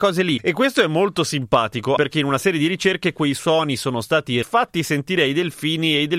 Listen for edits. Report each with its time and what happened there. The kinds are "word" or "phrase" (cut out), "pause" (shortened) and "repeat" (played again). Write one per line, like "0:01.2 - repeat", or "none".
0:02.0 - word
0:04.4 - word